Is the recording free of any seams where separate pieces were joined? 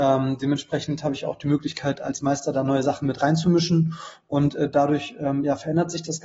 yes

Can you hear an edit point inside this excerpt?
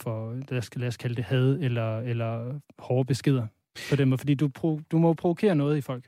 no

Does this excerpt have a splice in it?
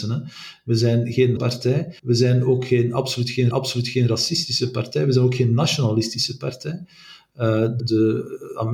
yes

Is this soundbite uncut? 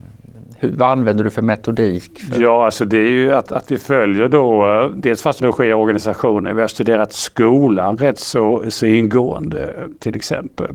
no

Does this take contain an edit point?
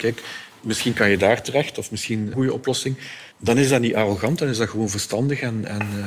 yes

